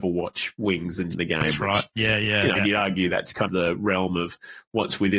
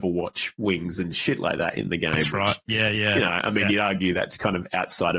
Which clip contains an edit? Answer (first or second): first